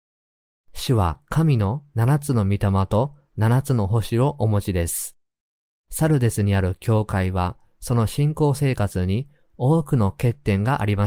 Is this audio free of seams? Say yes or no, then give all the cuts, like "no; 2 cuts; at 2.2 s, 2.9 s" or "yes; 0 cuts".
yes; 0 cuts